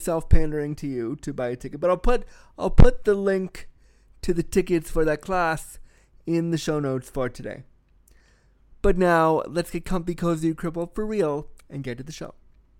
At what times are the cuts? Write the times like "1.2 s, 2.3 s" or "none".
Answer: none